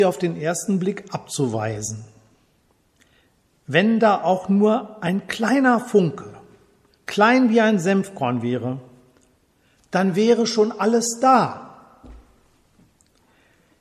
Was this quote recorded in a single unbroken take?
yes; 0 cuts

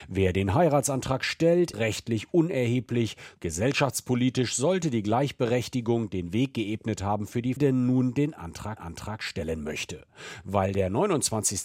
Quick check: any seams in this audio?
yes; 3 cuts; at 1.7 s, 7.6 s, 8.8 s

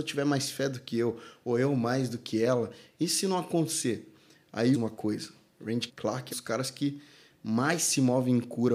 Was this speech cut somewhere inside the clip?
yes; 3 cuts; at 4.7 s, 5.9 s, 6.3 s

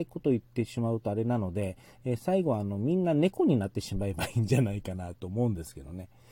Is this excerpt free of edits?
yes; 0 cuts

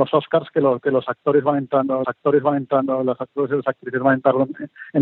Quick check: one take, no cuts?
no; 1 cut; at 2.0 s

